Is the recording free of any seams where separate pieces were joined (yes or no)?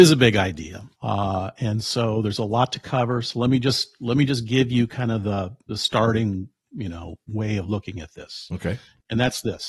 no